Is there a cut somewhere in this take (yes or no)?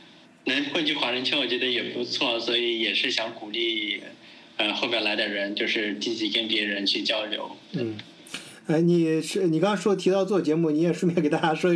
yes